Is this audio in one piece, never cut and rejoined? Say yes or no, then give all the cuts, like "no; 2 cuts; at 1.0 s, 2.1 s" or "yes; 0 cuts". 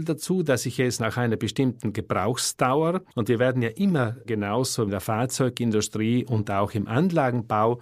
no; 3 cuts; at 3.1 s, 4.2 s, 4.9 s